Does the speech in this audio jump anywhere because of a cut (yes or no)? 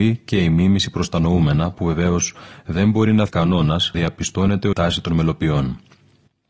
yes